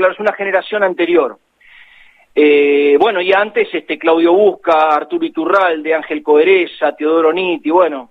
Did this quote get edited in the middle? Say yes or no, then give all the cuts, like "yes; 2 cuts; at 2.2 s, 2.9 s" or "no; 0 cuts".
no; 0 cuts